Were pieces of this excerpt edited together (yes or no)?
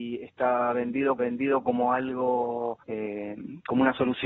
yes